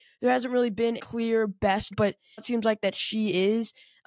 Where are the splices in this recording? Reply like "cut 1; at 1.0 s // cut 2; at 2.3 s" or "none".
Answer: cut 1; at 1.0 s // cut 2; at 1.9 s // cut 3; at 2.4 s